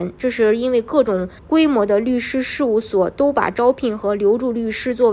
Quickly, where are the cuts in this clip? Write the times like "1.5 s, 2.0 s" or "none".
1.4 s